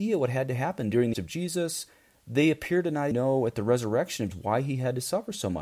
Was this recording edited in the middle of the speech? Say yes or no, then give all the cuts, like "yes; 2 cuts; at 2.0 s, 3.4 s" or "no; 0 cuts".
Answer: yes; 3 cuts; at 1.1 s, 3.1 s, 4.3 s